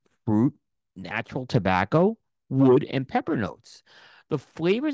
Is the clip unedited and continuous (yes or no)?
yes